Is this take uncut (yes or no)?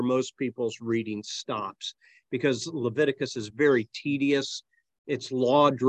yes